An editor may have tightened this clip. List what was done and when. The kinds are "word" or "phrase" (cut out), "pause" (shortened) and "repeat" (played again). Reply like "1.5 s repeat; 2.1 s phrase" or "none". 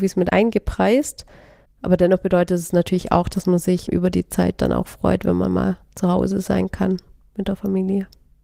none